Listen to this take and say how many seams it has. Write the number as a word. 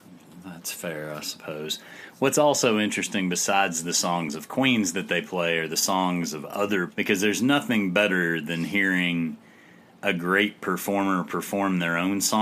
one